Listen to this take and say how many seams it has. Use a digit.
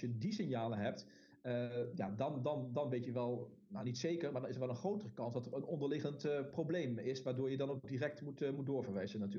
0